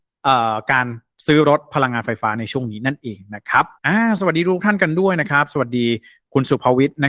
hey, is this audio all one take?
no; 1 cut; at 3.7 s

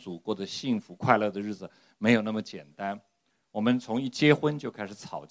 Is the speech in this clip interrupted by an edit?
no; 0 cuts

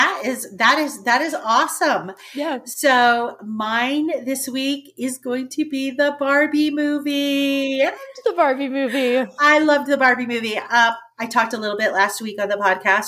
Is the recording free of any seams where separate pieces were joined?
yes; 0 cuts

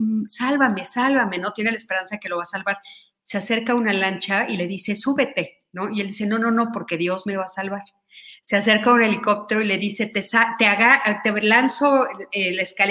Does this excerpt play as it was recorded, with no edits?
yes; 0 cuts

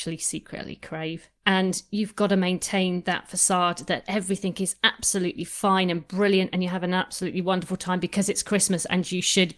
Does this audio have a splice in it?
yes; 1 cut; at 1.4 s

